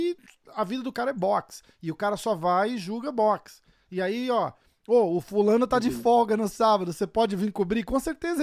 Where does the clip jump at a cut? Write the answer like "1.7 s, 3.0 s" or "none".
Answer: none